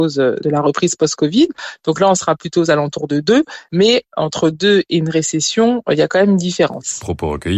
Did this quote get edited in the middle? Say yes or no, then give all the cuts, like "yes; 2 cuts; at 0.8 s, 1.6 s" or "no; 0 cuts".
no; 0 cuts